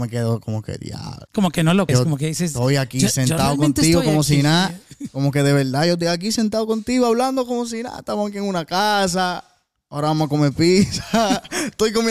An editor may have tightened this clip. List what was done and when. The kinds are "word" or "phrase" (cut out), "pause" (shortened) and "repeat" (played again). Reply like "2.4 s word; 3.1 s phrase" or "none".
1.3 s pause; 1.9 s word